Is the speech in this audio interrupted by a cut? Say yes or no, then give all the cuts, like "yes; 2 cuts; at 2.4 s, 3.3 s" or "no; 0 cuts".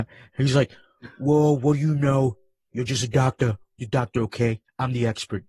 no; 0 cuts